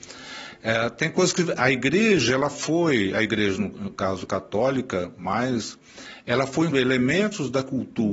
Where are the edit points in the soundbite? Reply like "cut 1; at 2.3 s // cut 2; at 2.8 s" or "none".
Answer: cut 1; at 1.6 s // cut 2; at 6.7 s